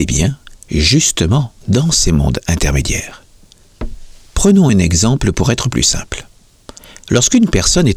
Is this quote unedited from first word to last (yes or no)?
yes